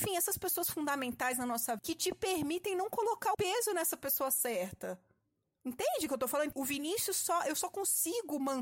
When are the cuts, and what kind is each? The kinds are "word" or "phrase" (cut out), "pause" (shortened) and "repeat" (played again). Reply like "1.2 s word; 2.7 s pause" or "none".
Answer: 1.8 s word; 3.3 s word; 6.5 s word

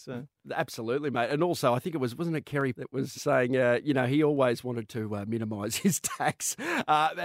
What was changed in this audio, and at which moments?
2.7 s word; 3.1 s word

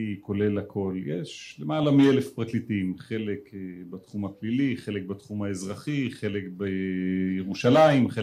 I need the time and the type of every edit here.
none

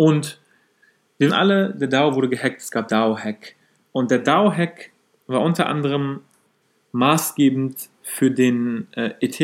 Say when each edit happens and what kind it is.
1.3 s word; 2.9 s word

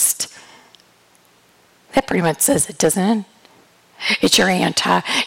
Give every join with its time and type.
none

